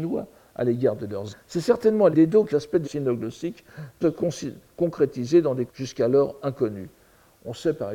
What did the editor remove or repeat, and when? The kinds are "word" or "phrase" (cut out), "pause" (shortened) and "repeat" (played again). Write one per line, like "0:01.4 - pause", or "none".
0:01.3 - word
0:02.1 - word
0:02.5 - word
0:02.8 - word
0:04.0 - word
0:05.7 - word